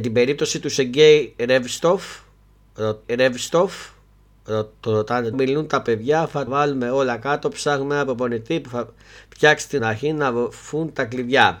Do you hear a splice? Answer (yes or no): yes